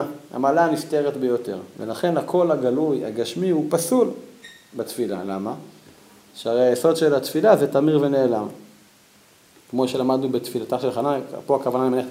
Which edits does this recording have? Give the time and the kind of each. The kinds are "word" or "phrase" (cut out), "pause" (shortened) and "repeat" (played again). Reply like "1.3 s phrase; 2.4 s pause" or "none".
none

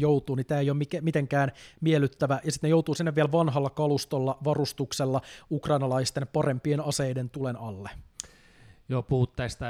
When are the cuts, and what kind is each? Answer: none

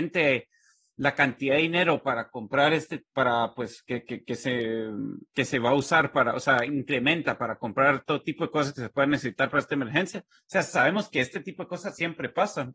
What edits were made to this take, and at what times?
5.3 s pause

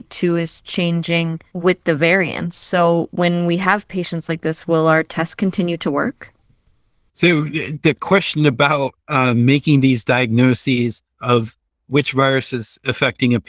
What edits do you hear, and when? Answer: 1.5 s pause; 9.0 s pause; 11.1 s pause

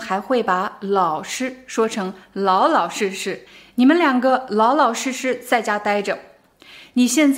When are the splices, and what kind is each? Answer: 3.5 s pause

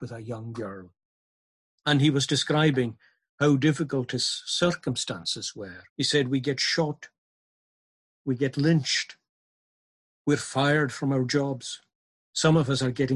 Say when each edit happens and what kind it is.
5.9 s pause

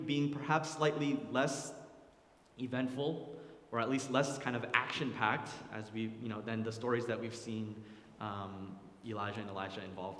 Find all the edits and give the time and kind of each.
none

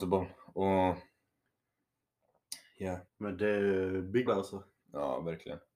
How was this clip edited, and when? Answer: 3.1 s pause; 4.3 s phrase

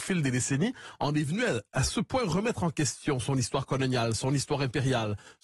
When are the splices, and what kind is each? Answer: none

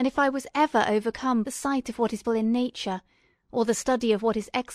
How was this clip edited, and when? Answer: 1.4 s phrase; 2.2 s word

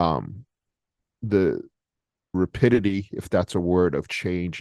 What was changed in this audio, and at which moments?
2.3 s word

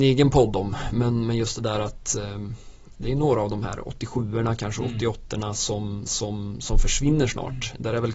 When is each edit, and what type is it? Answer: 6.1 s repeat

